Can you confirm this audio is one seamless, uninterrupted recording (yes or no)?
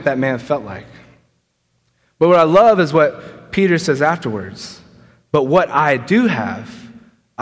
yes